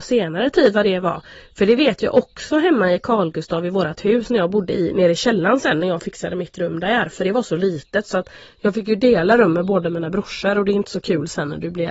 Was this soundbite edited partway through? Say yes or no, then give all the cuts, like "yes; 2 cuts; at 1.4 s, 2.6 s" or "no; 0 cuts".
no; 0 cuts